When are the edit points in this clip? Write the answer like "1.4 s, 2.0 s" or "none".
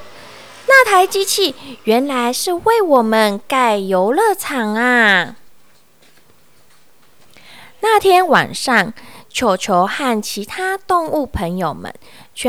none